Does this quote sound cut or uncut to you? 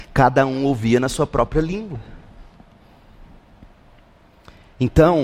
uncut